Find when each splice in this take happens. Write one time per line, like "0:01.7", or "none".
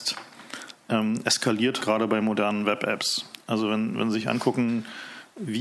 0:01.8